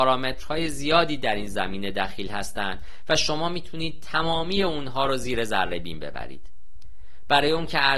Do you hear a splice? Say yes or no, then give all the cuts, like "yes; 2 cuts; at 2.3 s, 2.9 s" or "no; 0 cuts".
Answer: no; 0 cuts